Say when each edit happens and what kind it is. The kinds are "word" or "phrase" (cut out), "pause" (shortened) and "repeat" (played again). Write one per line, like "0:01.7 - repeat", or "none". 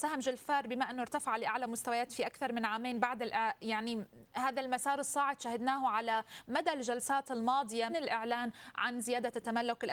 0:07.9 - word